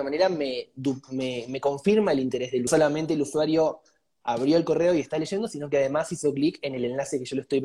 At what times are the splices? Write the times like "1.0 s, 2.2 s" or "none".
2.7 s